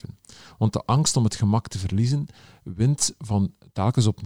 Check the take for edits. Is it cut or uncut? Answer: uncut